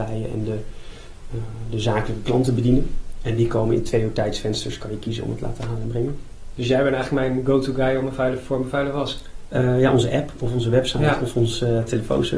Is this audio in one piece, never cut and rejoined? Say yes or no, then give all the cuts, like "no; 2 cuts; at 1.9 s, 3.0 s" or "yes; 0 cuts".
yes; 0 cuts